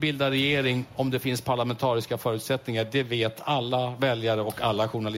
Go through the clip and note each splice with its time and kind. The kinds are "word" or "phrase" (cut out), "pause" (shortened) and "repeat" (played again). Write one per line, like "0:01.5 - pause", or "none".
none